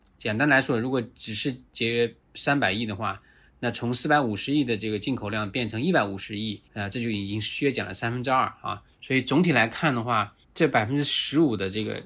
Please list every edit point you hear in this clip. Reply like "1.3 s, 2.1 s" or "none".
2.2 s, 6.7 s, 8.9 s, 10.4 s